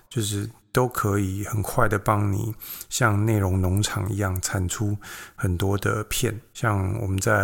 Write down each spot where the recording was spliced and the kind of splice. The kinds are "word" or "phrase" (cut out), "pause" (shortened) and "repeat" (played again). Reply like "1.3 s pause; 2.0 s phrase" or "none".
6.5 s pause